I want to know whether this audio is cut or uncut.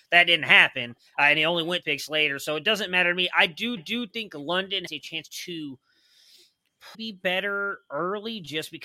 cut